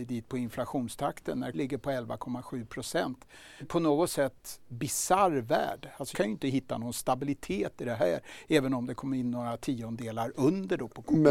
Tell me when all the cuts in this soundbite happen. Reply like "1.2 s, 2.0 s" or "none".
1.5 s, 3.6 s, 4.7 s, 6.1 s